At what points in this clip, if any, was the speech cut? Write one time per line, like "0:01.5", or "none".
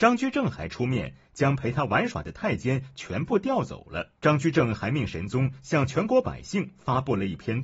0:04.2